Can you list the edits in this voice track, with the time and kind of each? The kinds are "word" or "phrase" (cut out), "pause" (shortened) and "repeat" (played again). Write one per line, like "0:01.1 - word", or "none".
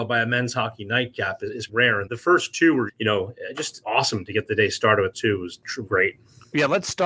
0:01.7 - word
0:02.1 - word
0:02.9 - word
0:03.8 - word
0:05.1 - word
0:05.9 - word